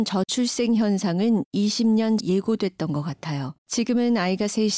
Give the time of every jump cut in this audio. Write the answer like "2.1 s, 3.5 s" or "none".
2.2 s, 3.6 s